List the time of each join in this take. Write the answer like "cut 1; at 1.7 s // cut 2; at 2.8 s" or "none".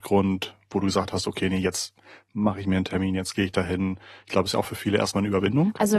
none